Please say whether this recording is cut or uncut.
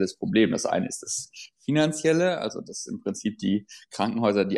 uncut